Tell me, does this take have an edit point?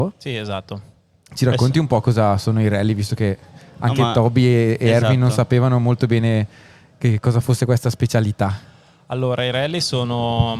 no; 0 cuts

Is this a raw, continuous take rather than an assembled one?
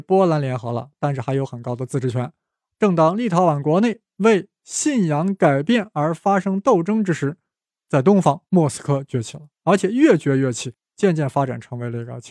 no; 2 cuts; at 8.5 s, 9.5 s

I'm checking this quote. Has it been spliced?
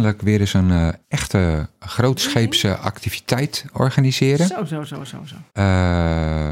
yes; 2 cuts; at 1.0 s, 5.5 s

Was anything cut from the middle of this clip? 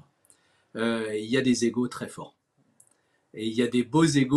no; 0 cuts

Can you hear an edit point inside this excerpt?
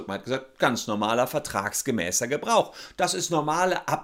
no; 0 cuts

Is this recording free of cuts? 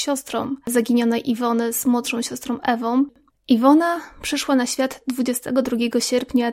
yes; 0 cuts

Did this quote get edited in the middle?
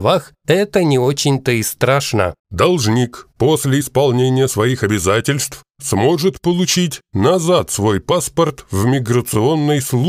yes; 1 cut; at 2.4 s

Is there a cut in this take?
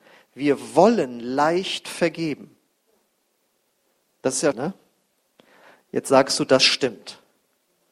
yes; 1 cut; at 4.5 s

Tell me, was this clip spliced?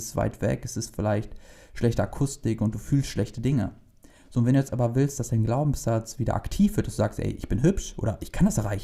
no; 0 cuts

